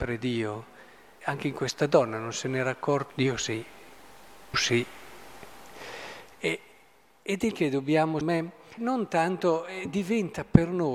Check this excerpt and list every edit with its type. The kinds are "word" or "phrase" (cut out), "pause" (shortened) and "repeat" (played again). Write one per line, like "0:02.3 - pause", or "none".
0:01.2 - word
0:03.1 - word
0:04.5 - word
0:07.5 - word
0:08.2 - word
0:08.8 - word